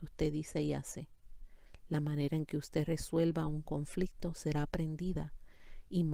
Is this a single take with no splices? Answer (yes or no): yes